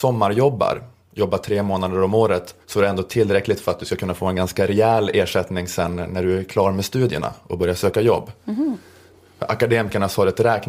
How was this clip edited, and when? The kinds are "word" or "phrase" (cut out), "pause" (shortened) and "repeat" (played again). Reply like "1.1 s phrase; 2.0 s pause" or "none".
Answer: 2.6 s pause